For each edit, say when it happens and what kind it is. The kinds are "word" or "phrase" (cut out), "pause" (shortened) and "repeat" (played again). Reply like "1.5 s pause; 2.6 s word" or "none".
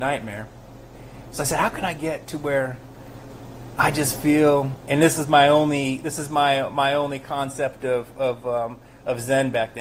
none